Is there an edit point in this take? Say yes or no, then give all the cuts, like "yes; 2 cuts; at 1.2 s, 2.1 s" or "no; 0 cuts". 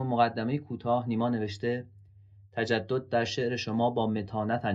no; 0 cuts